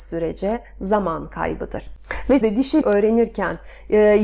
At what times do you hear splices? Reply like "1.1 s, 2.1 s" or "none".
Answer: 2.4 s, 2.8 s